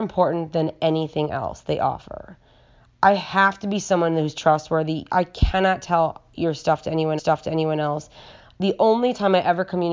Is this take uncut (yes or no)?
no